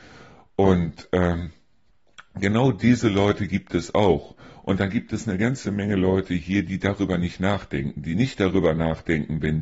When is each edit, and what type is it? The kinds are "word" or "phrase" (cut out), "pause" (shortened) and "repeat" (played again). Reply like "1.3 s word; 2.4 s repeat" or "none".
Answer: none